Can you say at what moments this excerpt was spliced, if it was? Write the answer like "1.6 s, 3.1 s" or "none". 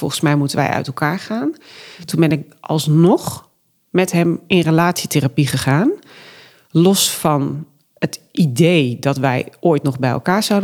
none